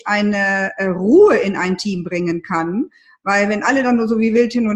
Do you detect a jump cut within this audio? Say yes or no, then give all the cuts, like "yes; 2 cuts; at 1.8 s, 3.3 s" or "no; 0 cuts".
no; 0 cuts